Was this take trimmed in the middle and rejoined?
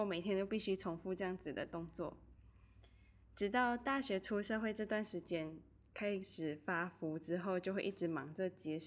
no; 0 cuts

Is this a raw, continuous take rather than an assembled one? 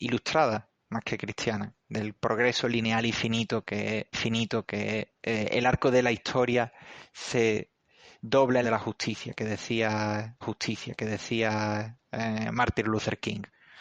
no; 3 cuts; at 4.1 s, 8.6 s, 10.4 s

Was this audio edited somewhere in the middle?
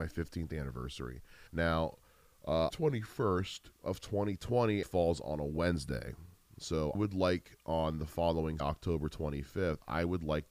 yes; 6 cuts; at 1.5 s, 2.7 s, 3.8 s, 4.8 s, 6.9 s, 8.6 s

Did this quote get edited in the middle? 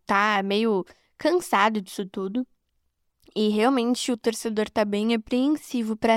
no; 0 cuts

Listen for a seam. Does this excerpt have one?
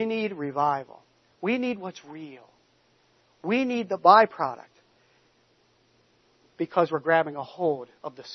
no; 0 cuts

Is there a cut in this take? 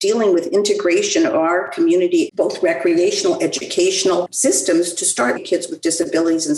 yes; 2 cuts; at 2.3 s, 5.4 s

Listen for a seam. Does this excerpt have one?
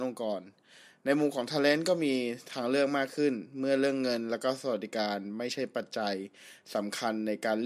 no; 0 cuts

